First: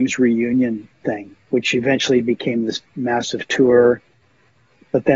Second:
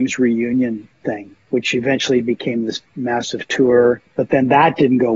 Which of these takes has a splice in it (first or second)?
second